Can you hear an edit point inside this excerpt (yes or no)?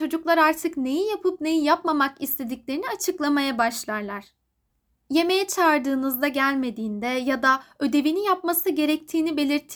no